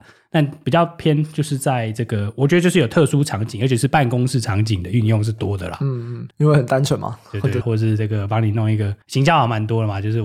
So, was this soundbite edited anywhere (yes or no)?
yes